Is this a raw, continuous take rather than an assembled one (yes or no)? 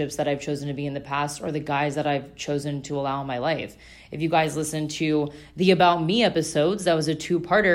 yes